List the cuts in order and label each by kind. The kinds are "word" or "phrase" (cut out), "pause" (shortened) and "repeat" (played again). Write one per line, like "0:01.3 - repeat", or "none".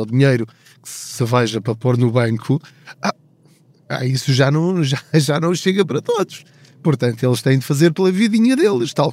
none